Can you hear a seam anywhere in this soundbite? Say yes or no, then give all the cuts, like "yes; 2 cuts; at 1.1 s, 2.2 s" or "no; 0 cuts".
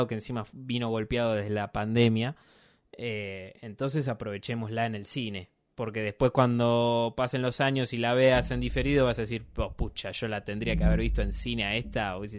no; 0 cuts